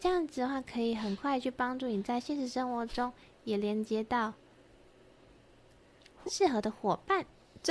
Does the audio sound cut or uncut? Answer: uncut